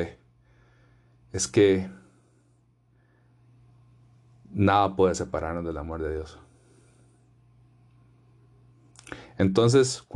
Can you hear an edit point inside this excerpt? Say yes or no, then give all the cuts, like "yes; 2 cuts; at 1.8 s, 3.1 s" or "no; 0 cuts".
no; 0 cuts